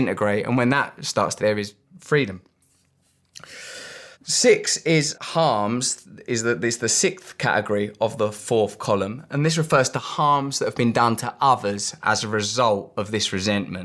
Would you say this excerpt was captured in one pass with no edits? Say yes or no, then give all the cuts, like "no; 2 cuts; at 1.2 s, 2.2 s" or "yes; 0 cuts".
no; 3 cuts; at 1.4 s, 4.1 s, 5.1 s